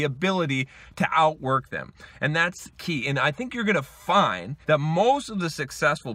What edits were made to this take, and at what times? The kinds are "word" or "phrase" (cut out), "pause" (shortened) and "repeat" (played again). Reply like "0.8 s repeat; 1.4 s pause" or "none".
4.6 s pause